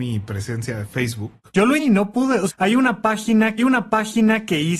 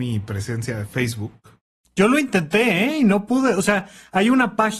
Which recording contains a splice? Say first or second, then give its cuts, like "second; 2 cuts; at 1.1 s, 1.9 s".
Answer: first; 4 cuts; at 1.5 s, 1.8 s, 2.5 s, 3.6 s